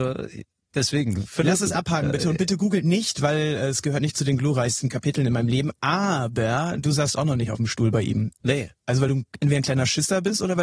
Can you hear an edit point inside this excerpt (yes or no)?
no